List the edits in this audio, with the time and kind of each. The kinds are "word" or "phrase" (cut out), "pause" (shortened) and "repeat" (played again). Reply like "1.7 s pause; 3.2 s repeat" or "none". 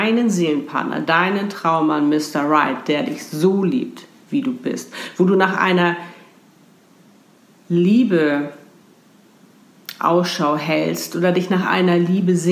none